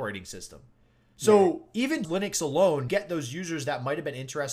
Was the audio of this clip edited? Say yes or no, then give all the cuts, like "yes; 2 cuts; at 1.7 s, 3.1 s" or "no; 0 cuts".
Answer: yes; 2 cuts; at 2.0 s, 2.9 s